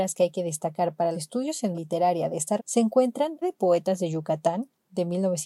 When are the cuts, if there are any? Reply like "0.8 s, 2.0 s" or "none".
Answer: 1.1 s, 1.7 s, 2.6 s, 3.4 s